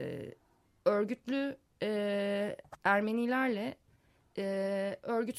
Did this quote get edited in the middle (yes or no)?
no